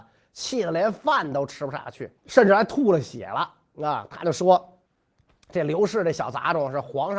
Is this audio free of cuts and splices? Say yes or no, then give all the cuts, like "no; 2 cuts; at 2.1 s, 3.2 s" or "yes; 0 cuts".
no; 2 cuts; at 2.2 s, 4.8 s